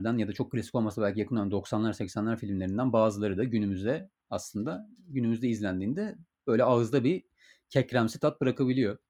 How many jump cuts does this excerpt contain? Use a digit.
0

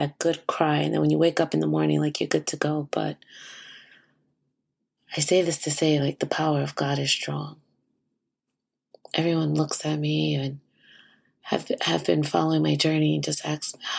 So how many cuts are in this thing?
0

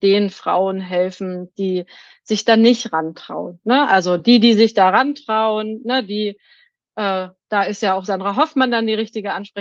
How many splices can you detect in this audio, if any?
0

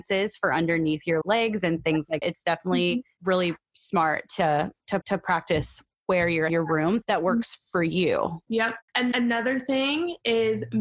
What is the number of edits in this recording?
5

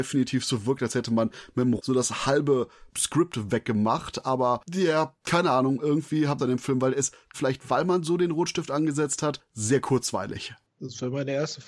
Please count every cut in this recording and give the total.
4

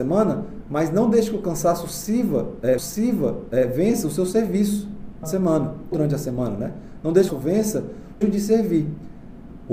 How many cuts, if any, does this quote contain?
5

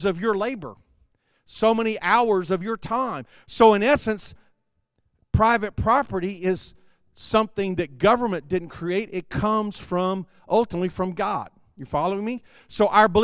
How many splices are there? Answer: 0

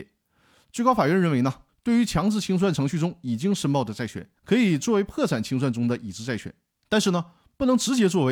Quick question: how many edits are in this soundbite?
1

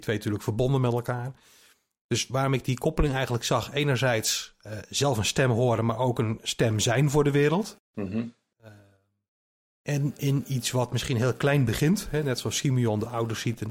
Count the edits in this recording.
0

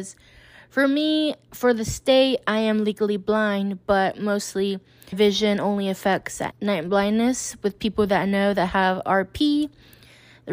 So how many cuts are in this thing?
2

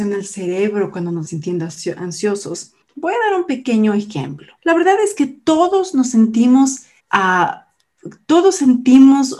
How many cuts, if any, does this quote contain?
4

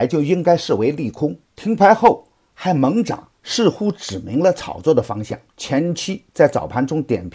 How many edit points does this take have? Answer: 3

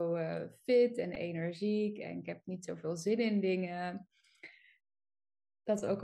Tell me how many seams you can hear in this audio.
0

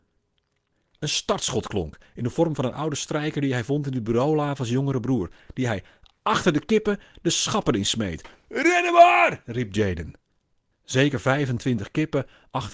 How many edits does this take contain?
0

